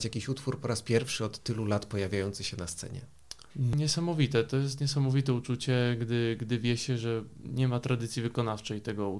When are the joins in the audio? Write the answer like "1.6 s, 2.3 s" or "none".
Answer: 3.5 s